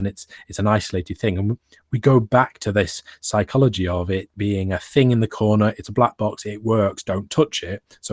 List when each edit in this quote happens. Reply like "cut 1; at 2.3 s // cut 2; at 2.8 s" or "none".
none